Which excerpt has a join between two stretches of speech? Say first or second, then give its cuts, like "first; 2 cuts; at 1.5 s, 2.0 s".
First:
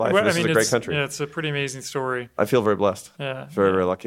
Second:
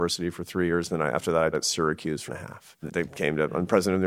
second; 3 cuts; at 1.5 s, 2.3 s, 2.9 s